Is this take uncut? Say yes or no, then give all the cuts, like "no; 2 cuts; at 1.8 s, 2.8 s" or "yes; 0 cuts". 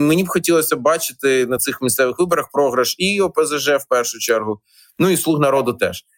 yes; 0 cuts